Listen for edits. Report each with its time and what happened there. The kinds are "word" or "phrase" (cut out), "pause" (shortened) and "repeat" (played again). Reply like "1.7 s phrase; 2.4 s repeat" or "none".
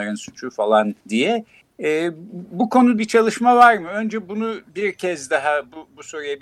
1.0 s pause; 3.0 s word; 4.7 s pause